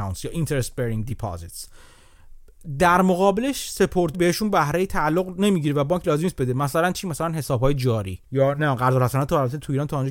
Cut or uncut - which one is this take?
cut